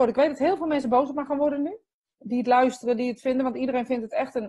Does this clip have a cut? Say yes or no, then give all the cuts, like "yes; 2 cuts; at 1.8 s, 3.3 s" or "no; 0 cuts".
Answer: no; 0 cuts